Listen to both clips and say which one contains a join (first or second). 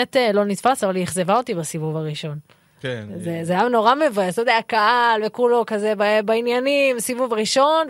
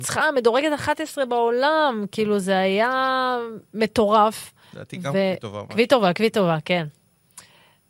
second